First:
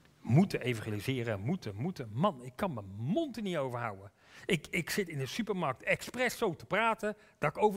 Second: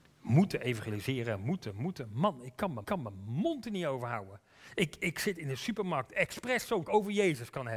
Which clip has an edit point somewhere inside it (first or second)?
second